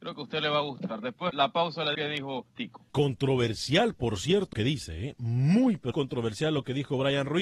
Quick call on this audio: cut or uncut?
cut